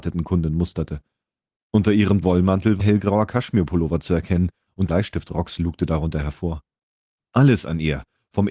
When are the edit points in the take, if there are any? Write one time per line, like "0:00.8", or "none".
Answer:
0:02.2
0:02.8
0:04.9